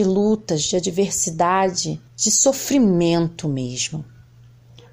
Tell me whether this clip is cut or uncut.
cut